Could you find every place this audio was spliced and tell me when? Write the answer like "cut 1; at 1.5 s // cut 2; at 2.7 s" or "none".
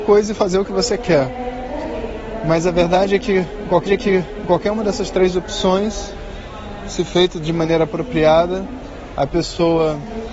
cut 1; at 3.9 s